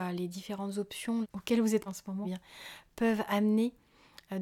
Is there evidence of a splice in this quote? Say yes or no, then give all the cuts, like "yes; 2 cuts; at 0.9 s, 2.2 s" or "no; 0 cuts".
yes; 3 cuts; at 1.2 s, 1.9 s, 2.2 s